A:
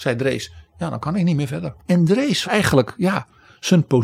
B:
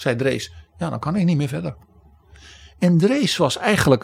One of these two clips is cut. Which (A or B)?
A